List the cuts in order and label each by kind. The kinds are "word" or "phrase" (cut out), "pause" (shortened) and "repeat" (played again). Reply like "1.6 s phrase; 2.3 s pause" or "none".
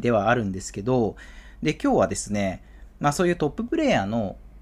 none